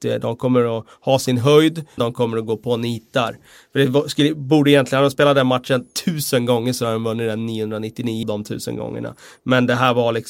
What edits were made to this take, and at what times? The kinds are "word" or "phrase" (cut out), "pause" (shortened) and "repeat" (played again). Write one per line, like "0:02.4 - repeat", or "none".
0:02.0 - word
0:08.2 - word